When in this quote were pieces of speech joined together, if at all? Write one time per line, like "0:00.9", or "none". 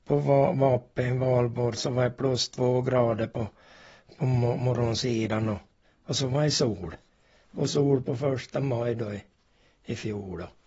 none